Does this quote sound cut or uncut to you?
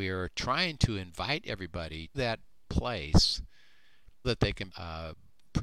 cut